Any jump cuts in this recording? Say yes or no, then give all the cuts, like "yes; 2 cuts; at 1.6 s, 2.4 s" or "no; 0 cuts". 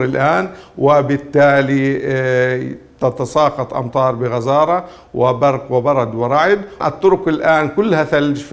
yes; 1 cut; at 6.8 s